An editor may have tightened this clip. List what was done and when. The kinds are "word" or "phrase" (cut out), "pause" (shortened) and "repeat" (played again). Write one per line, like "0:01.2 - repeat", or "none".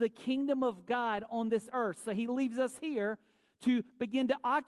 none